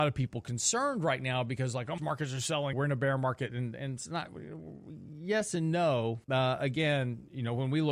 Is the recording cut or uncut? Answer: cut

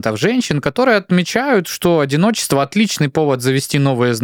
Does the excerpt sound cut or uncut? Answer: uncut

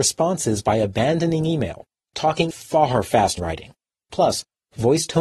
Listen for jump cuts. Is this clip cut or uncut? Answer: cut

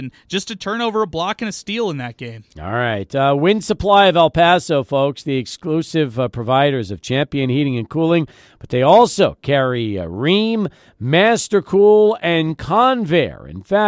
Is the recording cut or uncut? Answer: uncut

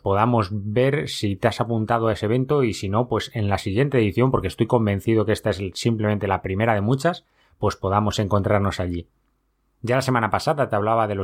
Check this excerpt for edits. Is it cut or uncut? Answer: uncut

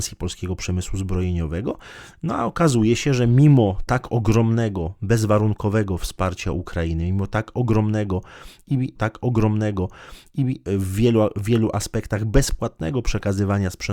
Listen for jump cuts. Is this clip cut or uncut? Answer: cut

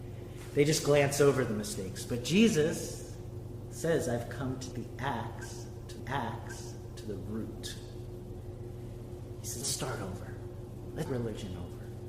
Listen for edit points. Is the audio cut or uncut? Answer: cut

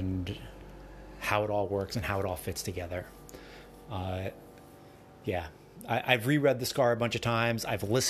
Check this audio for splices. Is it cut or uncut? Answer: uncut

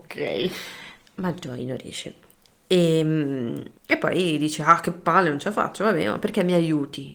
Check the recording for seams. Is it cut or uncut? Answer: cut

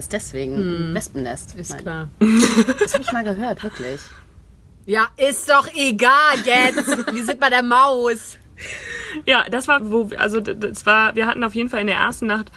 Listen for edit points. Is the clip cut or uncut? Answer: cut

